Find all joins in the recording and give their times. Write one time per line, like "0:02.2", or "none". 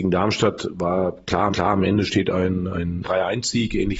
0:01.5
0:03.0